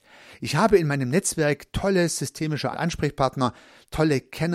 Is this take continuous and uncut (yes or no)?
no